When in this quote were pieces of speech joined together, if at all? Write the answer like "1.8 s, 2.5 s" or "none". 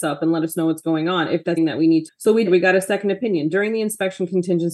1.6 s, 2.1 s, 2.5 s

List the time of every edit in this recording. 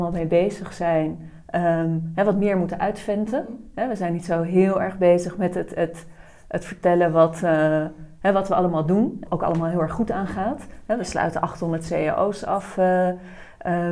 9.3 s

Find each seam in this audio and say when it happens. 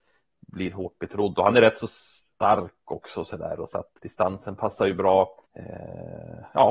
4.0 s, 5.4 s

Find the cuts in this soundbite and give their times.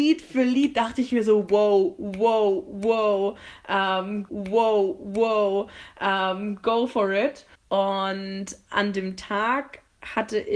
4.3 s, 7.6 s

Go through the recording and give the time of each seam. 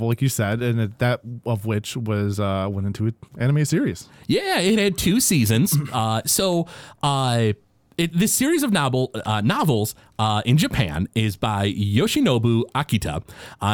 3.3 s

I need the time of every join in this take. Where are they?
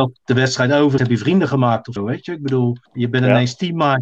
1.0 s, 2.0 s, 2.9 s

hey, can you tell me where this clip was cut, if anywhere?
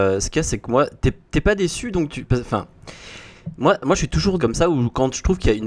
4.4 s

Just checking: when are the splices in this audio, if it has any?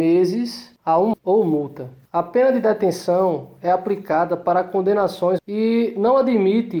1.1 s, 5.4 s

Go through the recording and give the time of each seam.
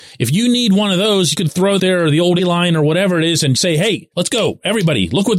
1.3 s, 1.8 s, 2.4 s, 3.6 s, 4.1 s

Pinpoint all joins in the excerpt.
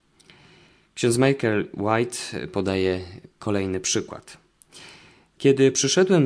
none

